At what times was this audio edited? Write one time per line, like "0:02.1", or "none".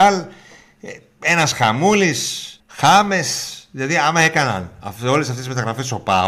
0:02.6